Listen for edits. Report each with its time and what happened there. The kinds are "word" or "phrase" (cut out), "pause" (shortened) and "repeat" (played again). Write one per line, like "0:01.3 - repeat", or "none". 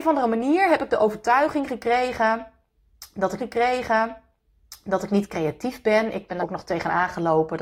0:03.4 - repeat
0:06.4 - word